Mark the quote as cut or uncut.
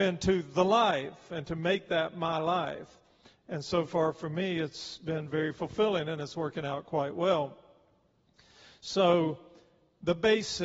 uncut